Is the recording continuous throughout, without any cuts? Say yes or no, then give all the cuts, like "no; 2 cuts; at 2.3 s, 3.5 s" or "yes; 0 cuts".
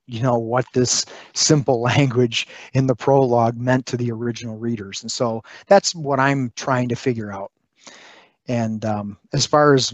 yes; 0 cuts